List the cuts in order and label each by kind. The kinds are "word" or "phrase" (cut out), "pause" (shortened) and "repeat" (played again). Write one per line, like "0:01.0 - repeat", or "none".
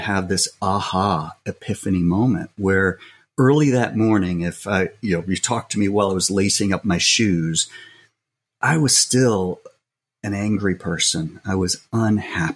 none